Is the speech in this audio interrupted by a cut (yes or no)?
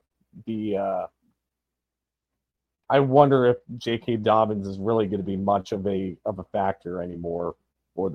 no